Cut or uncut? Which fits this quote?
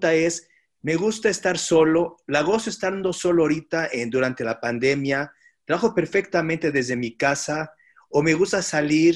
uncut